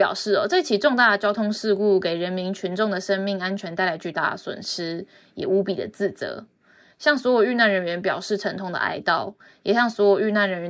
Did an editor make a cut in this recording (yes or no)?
no